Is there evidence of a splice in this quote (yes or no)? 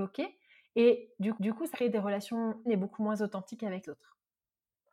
yes